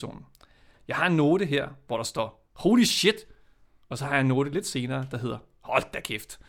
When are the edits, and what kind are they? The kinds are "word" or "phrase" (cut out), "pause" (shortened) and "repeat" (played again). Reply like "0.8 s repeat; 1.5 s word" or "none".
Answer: none